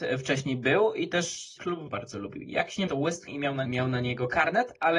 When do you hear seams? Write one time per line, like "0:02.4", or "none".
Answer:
0:01.6
0:01.9
0:02.9
0:03.3
0:03.7